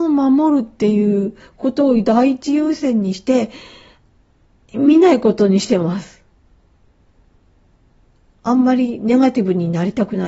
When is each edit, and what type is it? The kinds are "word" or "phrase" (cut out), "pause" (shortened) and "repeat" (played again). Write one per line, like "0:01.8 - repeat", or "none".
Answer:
none